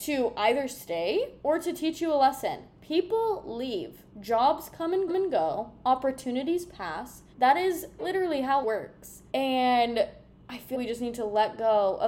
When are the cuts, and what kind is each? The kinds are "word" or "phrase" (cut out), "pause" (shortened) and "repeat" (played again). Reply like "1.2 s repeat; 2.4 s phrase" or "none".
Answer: 1.4 s pause; 4.1 s pause; 5.1 s repeat; 7.3 s pause; 8.0 s word; 8.6 s word; 9.3 s pause; 10.7 s word

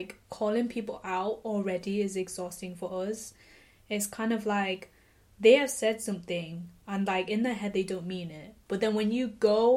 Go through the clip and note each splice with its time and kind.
none

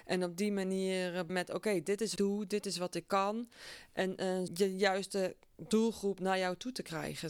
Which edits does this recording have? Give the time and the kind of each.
1.3 s word; 2.2 s phrase; 4.5 s phrase

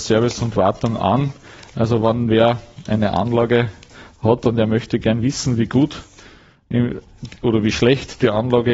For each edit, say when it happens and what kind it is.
none

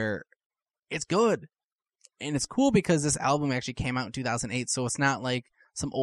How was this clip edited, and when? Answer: none

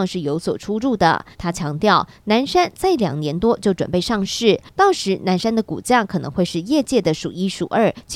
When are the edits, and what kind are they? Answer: 1.3 s pause

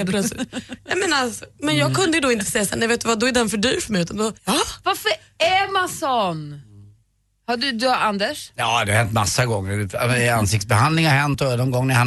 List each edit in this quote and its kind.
4.4 s pause

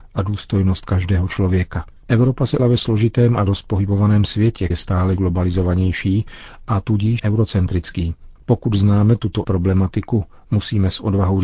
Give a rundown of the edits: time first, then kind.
2.0 s pause; 2.6 s word; 3.5 s word; 4.7 s word; 5.2 s word; 7.2 s phrase; 8.4 s pause; 9.4 s word

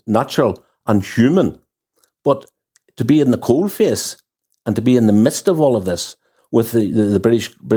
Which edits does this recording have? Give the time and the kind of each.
none

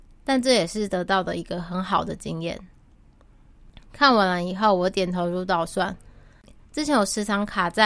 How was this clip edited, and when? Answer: none

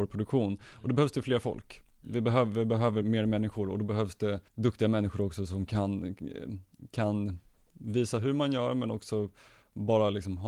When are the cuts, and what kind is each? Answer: 3.0 s word; 4.5 s pause

